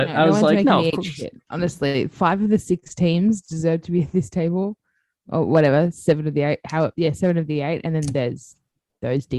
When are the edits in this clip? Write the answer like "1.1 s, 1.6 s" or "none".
none